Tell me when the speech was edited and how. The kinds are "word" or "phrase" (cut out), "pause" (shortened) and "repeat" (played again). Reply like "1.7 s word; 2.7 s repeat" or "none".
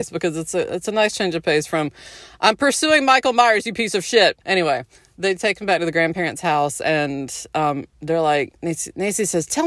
4.4 s pause; 7.9 s pause